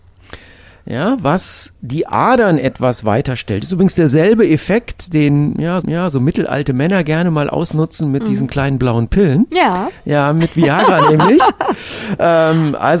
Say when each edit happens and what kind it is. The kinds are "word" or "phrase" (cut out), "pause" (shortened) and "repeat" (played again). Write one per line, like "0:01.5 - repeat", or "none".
0:05.8 - repeat